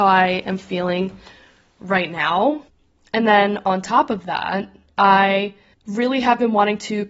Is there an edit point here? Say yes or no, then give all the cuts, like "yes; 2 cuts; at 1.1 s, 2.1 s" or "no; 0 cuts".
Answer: no; 0 cuts